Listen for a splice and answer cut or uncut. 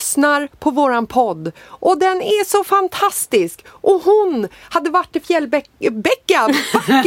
uncut